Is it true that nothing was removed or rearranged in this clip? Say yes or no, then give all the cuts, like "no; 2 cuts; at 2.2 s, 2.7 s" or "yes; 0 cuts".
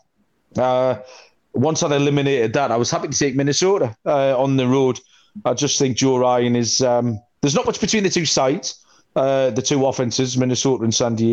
yes; 0 cuts